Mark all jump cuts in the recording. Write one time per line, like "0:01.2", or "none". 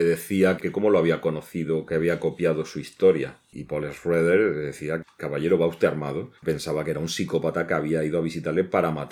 0:06.4